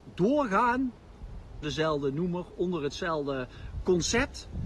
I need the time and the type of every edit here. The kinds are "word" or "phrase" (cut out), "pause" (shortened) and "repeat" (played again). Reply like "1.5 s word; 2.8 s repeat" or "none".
1.6 s word